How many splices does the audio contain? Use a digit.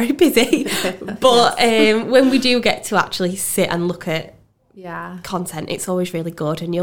0